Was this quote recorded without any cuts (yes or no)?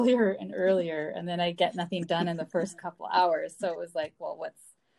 yes